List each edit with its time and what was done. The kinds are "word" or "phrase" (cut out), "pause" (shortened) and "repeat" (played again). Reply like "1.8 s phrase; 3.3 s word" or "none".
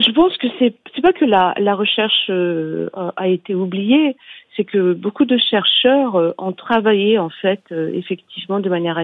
none